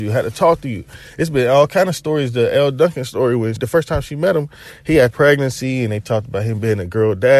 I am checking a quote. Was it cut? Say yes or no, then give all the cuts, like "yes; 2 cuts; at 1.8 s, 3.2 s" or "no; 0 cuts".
yes; 2 cuts; at 3.6 s, 5.1 s